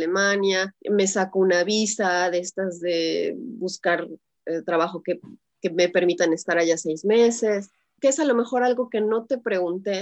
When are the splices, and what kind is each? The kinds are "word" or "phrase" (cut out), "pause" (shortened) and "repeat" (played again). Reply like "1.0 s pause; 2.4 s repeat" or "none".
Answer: none